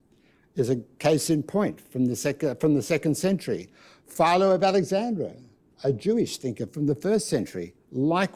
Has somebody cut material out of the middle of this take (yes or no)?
no